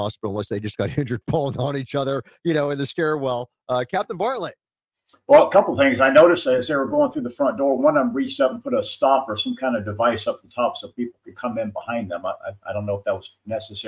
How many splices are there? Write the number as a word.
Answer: zero